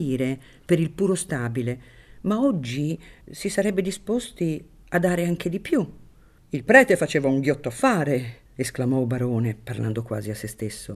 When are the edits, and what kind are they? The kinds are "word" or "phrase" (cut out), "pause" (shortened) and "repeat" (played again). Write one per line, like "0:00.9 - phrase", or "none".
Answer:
0:03.2 - pause
0:06.4 - pause
0:08.5 - pause